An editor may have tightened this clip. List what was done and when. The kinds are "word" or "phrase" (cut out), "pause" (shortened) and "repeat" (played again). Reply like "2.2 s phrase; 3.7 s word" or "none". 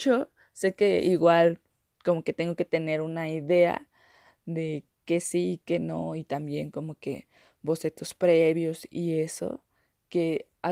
none